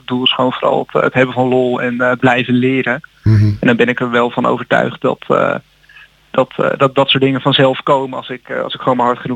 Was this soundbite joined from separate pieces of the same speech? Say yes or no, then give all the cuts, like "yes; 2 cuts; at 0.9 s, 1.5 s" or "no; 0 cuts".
no; 0 cuts